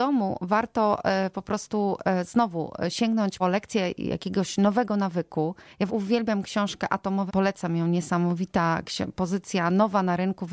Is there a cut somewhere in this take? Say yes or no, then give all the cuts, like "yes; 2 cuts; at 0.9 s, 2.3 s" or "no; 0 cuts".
yes; 3 cuts; at 3.4 s, 5.9 s, 7.3 s